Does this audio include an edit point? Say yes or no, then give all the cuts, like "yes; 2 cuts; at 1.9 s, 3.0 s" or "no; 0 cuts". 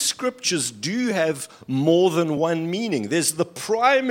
no; 0 cuts